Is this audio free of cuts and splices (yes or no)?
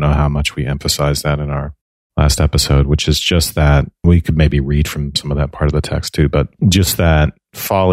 yes